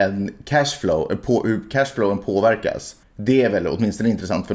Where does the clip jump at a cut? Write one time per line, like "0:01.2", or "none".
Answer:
0:03.0